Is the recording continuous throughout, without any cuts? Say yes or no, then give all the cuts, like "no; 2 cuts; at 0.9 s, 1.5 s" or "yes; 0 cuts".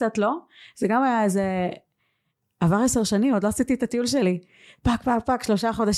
yes; 0 cuts